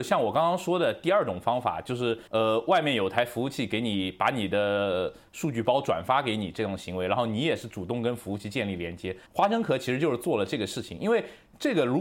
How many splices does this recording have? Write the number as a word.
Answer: two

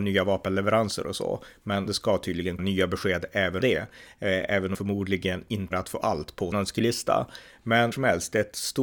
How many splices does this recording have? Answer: seven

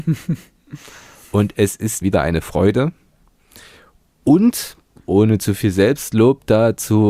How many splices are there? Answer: one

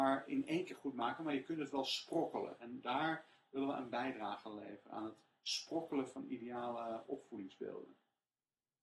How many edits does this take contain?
zero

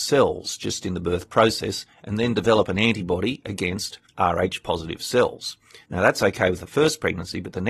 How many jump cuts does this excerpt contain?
two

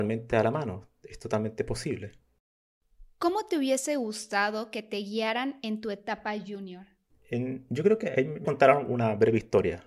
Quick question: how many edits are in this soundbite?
one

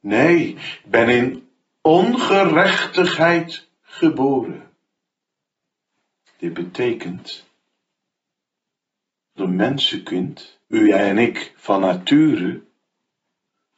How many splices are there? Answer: two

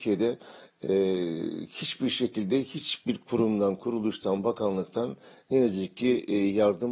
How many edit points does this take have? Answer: zero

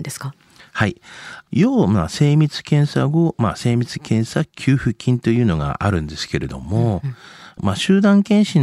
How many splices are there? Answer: zero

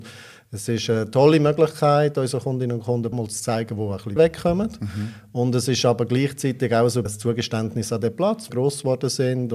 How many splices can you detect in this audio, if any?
four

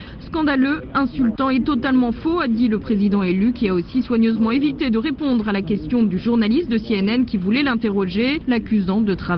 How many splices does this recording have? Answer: zero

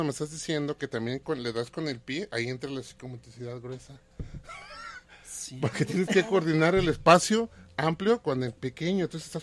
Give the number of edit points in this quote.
zero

